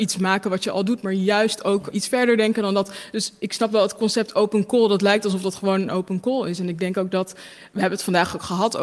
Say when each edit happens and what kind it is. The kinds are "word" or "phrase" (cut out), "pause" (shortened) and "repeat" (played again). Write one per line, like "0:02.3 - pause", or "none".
0:01.9 - word